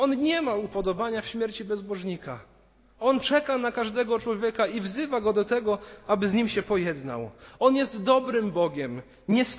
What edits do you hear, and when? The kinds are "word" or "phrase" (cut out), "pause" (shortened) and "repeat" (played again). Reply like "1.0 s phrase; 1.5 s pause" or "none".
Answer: none